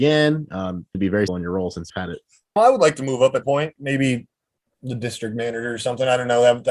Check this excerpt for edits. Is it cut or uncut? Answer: cut